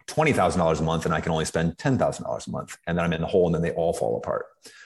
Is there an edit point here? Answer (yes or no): no